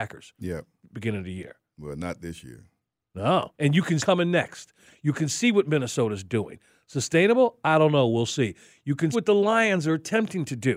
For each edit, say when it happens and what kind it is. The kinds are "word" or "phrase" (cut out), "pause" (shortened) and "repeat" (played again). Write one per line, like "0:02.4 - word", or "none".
0:03.5 - pause
0:04.0 - phrase
0:09.1 - word